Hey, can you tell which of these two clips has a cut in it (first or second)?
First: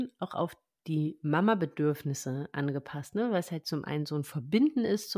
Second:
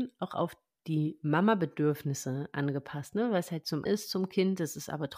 second